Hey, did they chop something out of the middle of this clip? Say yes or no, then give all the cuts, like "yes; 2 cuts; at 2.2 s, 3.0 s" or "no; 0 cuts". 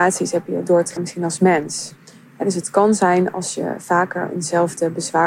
yes; 2 cuts; at 1.0 s, 2.0 s